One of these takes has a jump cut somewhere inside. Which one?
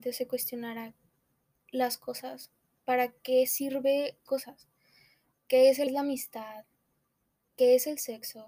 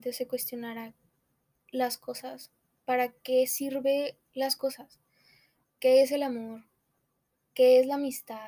first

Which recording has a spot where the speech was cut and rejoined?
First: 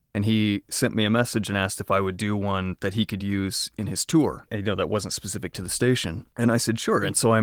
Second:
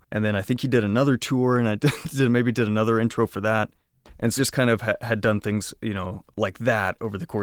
second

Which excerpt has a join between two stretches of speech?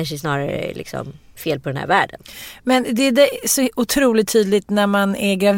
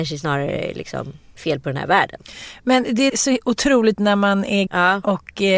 second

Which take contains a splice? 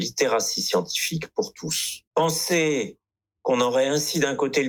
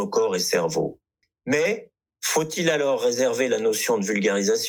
first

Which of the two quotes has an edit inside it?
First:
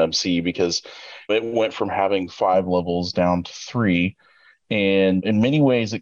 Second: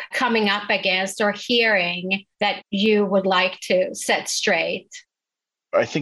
second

